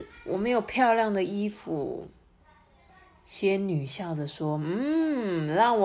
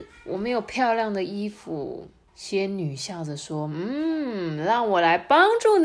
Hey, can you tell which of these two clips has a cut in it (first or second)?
second